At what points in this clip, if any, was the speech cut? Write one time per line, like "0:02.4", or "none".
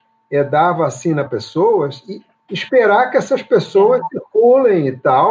0:01.3